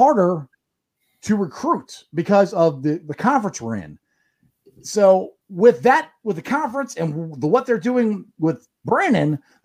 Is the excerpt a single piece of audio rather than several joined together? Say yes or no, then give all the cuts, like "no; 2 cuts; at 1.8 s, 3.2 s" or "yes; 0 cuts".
no; 1 cut; at 5.4 s